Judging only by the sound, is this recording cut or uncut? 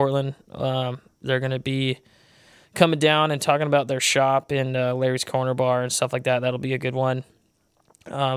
uncut